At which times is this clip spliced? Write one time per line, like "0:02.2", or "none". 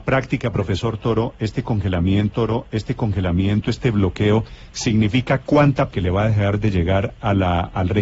0:02.3
0:05.9